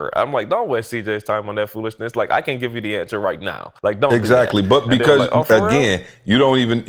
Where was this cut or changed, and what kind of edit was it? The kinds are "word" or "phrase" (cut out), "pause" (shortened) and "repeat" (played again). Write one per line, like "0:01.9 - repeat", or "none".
0:03.8 - pause